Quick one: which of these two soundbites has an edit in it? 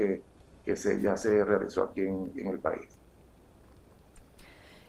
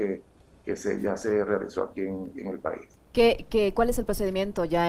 second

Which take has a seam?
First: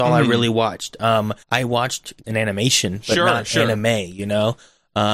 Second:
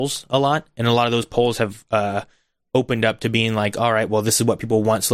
first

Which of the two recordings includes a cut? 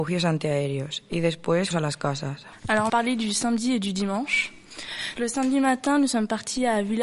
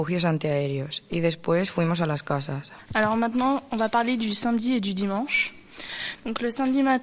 first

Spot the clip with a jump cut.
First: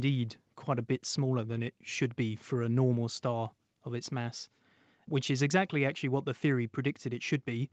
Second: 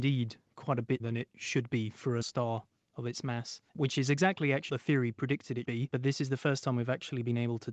second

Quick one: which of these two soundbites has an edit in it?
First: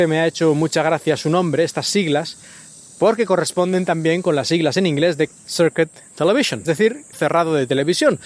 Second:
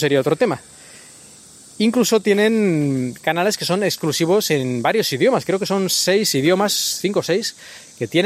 first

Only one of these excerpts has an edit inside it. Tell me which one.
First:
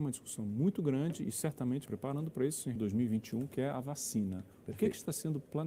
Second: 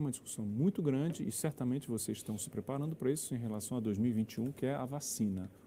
first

